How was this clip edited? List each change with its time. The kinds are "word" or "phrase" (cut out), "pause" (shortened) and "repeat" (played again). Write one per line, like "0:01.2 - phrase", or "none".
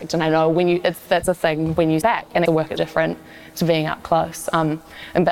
0:02.0 - word
0:02.5 - word
0:02.8 - word